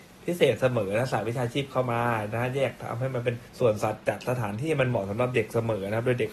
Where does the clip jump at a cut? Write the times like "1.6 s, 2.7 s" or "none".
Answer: 3.5 s